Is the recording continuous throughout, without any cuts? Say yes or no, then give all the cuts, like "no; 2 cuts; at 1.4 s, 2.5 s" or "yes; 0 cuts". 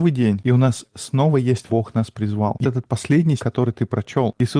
no; 3 cuts; at 1.7 s, 2.6 s, 3.4 s